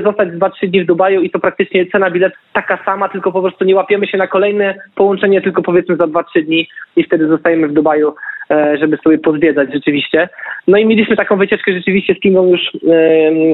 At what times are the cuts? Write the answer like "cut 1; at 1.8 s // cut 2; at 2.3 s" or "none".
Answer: cut 1; at 2.3 s